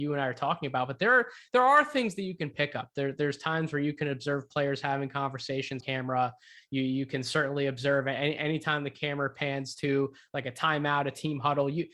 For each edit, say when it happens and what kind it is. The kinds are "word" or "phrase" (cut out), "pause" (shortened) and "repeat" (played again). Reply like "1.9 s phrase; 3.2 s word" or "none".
5.8 s word